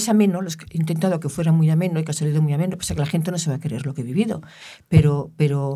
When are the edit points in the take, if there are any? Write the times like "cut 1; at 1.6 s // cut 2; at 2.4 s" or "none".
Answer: cut 1; at 2.1 s